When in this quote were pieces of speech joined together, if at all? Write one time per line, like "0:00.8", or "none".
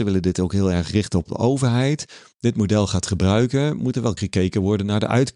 0:04.2